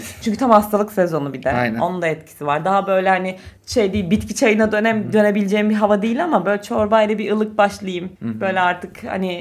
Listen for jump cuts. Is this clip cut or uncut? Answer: cut